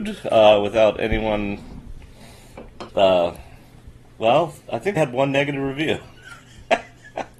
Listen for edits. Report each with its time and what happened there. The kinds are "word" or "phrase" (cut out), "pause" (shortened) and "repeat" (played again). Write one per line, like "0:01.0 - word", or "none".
0:02.9 - pause
0:04.6 - pause
0:05.0 - phrase